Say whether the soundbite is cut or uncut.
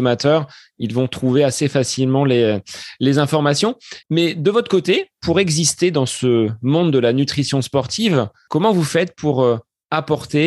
cut